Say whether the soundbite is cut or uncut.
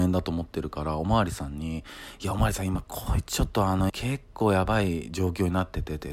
cut